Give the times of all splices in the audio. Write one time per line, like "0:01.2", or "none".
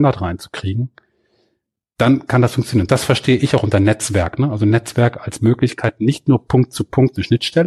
none

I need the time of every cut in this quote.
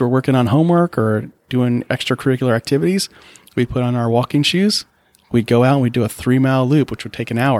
none

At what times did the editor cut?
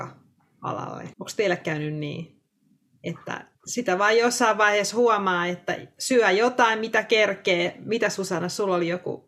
0:01.1
0:03.5

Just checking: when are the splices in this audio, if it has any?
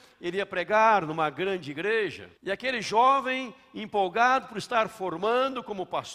0:02.4

